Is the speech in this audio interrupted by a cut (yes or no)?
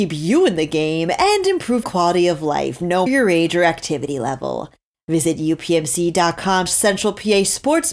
yes